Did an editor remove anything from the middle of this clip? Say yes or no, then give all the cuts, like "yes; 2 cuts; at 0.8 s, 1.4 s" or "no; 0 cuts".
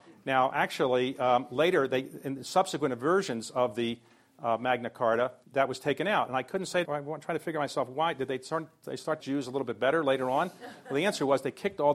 yes; 3 cuts; at 5.4 s, 6.8 s, 9.2 s